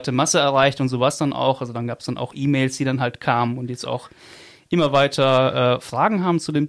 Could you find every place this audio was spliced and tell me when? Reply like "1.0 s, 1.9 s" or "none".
none